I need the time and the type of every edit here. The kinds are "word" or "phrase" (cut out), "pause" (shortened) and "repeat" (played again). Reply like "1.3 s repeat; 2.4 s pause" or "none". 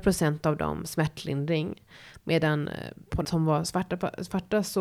3.2 s word